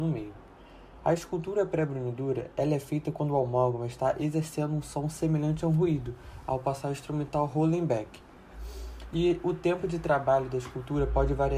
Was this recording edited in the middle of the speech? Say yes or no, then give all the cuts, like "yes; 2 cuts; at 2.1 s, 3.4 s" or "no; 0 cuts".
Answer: no; 0 cuts